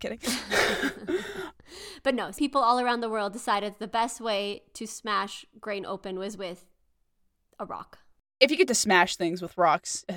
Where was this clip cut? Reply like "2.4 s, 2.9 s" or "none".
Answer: 2.4 s